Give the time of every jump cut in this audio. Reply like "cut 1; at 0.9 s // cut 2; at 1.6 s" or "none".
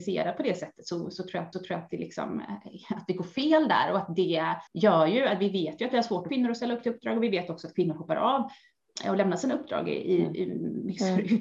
cut 1; at 1.5 s // cut 2; at 4.7 s // cut 3; at 6.3 s

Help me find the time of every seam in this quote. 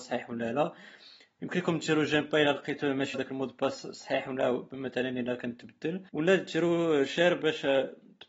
cut 1; at 3.1 s // cut 2; at 6.1 s

